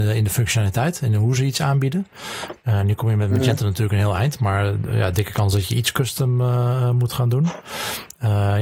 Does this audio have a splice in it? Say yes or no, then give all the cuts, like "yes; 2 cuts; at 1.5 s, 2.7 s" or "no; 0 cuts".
no; 0 cuts